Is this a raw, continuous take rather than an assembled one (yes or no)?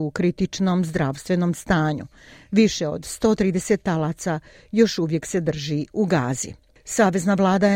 yes